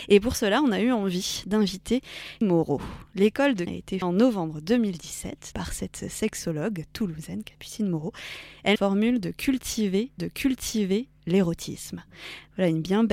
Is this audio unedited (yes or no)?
no